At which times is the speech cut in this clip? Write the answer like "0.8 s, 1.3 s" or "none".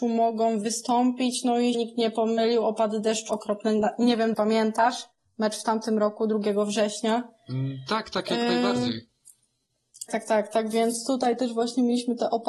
1.7 s, 3.3 s, 4.3 s, 5.1 s, 10.1 s